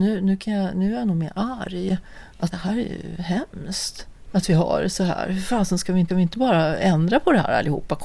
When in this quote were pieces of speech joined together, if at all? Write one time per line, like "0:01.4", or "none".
0:02.5
0:06.1